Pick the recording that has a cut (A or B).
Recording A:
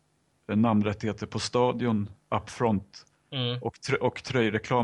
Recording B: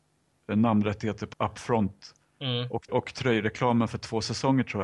B